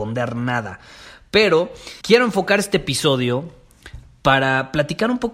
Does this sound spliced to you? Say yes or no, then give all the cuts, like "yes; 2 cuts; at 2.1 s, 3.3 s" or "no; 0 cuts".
yes; 1 cut; at 2.0 s